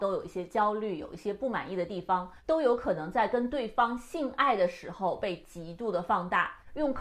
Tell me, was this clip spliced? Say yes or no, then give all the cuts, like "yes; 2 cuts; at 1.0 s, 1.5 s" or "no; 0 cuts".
no; 0 cuts